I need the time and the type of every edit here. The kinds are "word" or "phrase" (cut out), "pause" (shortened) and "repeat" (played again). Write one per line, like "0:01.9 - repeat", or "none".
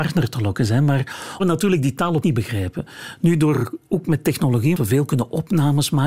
0:01.4 - word
0:02.2 - word
0:04.7 - word